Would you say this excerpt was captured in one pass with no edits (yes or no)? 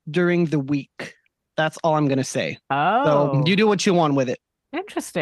no